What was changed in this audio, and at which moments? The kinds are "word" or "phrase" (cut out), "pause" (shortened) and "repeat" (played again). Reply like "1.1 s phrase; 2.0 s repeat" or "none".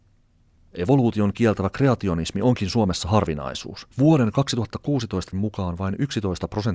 3.9 s pause; 5.3 s word